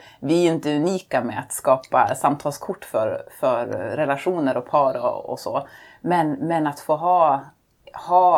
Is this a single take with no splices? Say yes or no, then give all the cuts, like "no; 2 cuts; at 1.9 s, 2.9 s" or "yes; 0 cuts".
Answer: yes; 0 cuts